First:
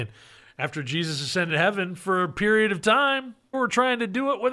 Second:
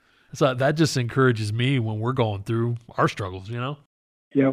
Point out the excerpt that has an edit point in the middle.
first; 2 cuts; at 1.5 s, 3.5 s

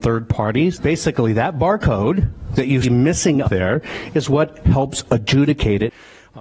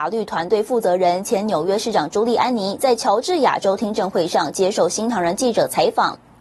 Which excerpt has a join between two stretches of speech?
first; 2 cuts; at 2.8 s, 3.4 s

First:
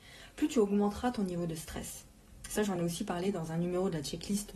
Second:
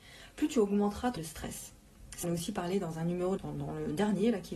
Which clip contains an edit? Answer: second; 3 cuts; at 1.2 s, 2.2 s, 3.4 s

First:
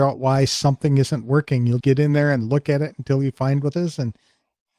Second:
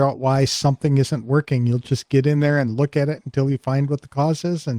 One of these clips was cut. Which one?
first; 2 cuts; at 1.8 s, 3.7 s

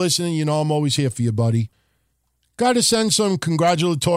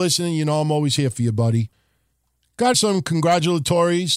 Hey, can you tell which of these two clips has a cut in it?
second; 1 cut; at 2.7 s

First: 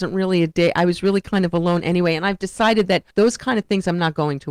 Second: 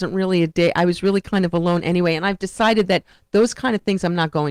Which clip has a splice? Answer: first; 1 cut; at 3.1 s

